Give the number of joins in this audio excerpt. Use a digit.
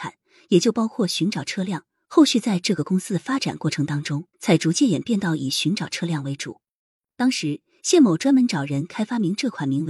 1